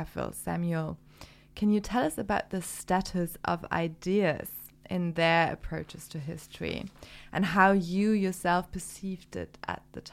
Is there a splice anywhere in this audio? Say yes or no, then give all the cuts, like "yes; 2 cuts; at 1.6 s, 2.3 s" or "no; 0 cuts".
no; 0 cuts